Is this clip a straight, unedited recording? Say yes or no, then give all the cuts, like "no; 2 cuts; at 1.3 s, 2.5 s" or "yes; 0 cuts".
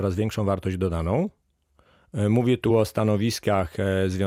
yes; 0 cuts